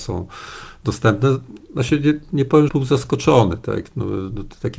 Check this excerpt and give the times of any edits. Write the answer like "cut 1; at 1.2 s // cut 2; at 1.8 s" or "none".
cut 1; at 2.7 s